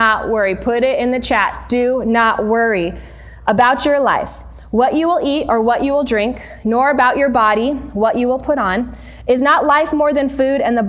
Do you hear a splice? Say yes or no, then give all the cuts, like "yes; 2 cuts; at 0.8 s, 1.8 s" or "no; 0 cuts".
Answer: no; 0 cuts